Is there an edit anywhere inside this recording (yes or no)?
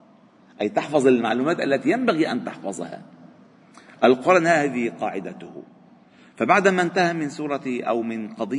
no